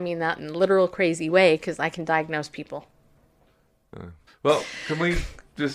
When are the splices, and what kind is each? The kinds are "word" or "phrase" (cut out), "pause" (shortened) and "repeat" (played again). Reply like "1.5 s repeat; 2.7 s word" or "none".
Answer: 4.3 s pause